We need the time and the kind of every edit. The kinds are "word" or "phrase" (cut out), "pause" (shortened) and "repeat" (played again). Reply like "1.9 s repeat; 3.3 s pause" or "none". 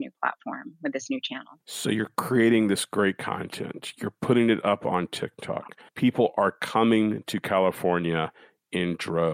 1.6 s pause; 5.9 s pause